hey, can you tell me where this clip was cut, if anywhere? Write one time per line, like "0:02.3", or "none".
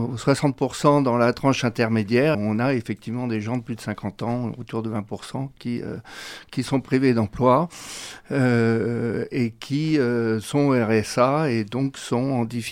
0:02.3

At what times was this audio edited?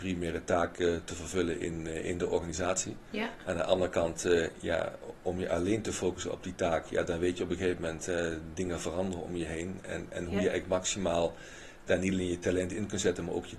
none

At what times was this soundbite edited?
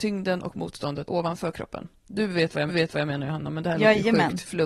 0:01.0
0:02.7

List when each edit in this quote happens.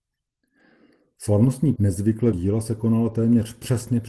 0:01.8
0:02.3

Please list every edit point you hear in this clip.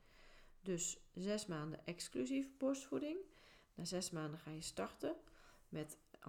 none

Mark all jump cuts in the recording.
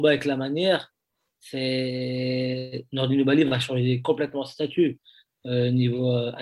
none

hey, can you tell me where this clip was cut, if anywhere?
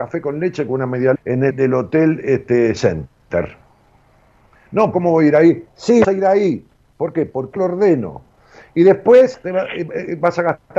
0:01.1
0:01.5
0:02.8
0:04.9
0:06.0
0:07.6

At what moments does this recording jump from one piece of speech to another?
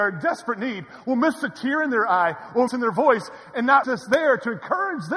0:02.7
0:03.8

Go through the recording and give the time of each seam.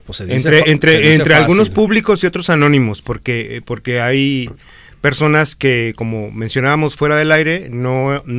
none

